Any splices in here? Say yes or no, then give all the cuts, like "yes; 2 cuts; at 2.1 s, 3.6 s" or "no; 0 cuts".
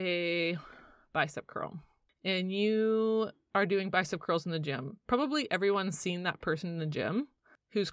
no; 0 cuts